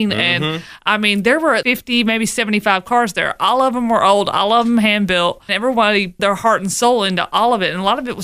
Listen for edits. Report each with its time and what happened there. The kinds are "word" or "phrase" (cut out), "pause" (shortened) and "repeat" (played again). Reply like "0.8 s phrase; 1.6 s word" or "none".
1.6 s word; 5.5 s phrase; 6.2 s word